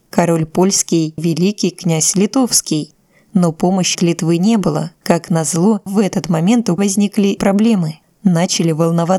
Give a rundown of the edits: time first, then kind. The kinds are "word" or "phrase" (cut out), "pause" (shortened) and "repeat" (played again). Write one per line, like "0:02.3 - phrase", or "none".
0:01.2 - word
0:03.9 - word
0:04.9 - word
0:05.9 - word
0:06.8 - word
0:07.4 - word